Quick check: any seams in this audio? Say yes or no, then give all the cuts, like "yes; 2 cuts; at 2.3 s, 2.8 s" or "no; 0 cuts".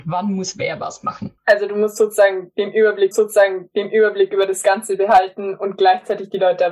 yes; 2 cuts; at 1.4 s, 3.1 s